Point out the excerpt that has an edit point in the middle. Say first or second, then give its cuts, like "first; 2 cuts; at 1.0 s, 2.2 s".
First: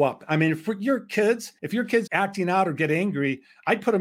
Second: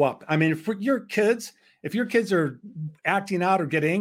first; 2 cuts; at 1.6 s, 2.1 s